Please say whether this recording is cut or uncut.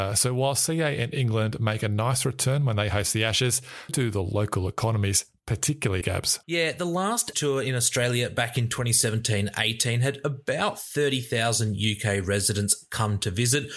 cut